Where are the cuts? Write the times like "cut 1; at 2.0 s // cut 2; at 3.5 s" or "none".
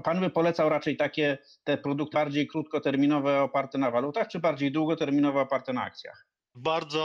cut 1; at 2.1 s